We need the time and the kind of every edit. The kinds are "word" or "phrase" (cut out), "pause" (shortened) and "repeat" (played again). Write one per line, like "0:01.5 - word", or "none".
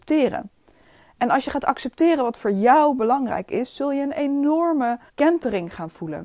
0:05.1 - pause